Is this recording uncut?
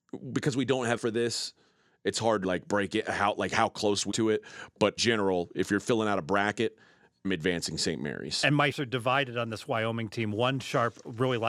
no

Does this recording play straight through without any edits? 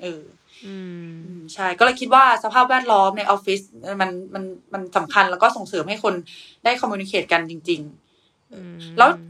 yes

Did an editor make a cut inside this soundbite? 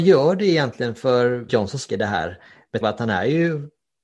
yes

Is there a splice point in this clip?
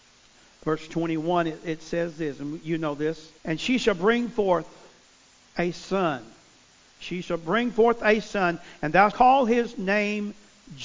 yes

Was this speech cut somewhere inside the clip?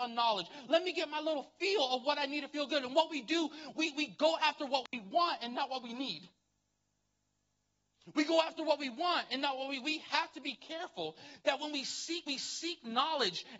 yes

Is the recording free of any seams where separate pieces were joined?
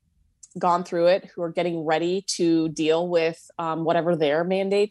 yes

